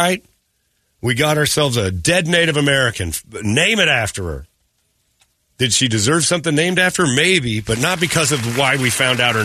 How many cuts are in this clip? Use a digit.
0